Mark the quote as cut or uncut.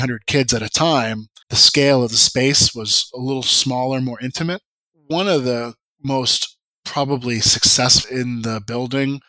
cut